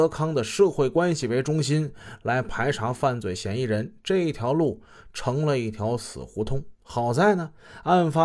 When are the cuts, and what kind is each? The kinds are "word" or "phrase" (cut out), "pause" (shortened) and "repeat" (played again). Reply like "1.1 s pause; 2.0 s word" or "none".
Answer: 6.7 s pause

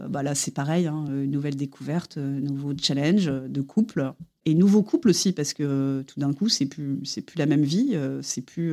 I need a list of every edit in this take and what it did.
none

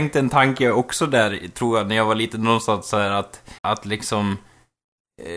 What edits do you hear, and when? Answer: 3.6 s pause

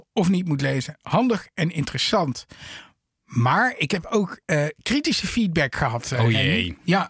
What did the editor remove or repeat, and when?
none

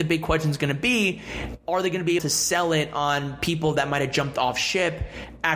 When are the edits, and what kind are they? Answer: 2.2 s word

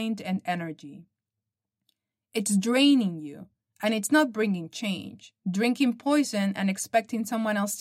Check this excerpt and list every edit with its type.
5.4 s pause

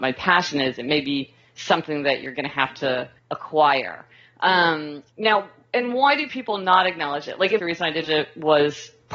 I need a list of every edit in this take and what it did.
3.2 s pause; 5.1 s pause; 7.6 s phrase; 8.0 s word

